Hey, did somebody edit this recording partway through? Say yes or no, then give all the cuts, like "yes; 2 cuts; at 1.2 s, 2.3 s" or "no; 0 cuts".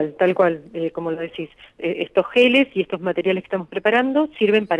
no; 0 cuts